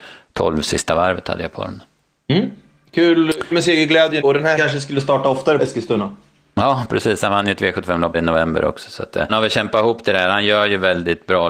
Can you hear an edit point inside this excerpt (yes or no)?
yes